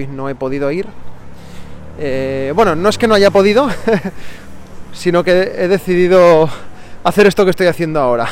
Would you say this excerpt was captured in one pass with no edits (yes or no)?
yes